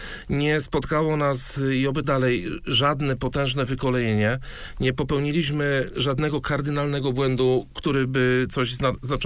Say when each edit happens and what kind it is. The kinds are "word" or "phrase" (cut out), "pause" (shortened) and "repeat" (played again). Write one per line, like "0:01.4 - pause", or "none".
0:02.0 - word